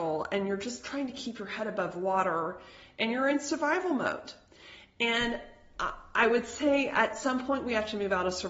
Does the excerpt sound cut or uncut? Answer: uncut